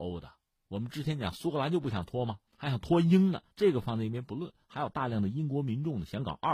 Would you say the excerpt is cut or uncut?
cut